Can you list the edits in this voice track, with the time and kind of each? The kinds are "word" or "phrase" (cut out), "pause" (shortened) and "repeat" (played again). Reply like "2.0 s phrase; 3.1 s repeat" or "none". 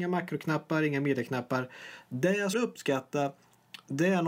2.5 s word